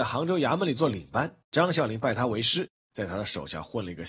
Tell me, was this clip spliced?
yes; 1 cut; at 1.4 s

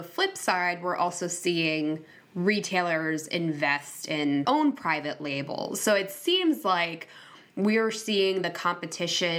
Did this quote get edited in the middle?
yes; 1 cut; at 4.4 s

